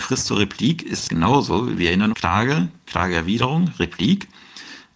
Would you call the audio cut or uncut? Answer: cut